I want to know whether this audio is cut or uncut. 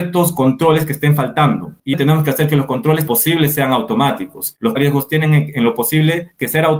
cut